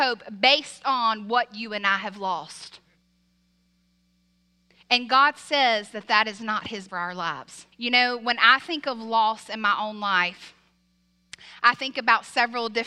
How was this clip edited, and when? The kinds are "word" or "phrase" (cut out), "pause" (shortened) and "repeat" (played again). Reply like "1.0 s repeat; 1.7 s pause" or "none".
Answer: 6.9 s word; 7.7 s pause